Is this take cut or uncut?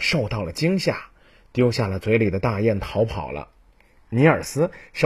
uncut